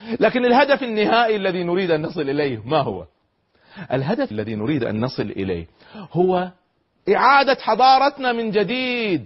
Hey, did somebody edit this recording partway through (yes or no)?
yes